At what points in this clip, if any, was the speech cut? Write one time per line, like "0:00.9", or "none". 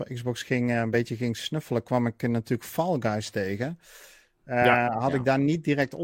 none